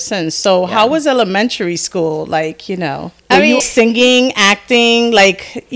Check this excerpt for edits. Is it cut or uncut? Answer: cut